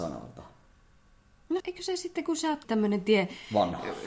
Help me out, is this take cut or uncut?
cut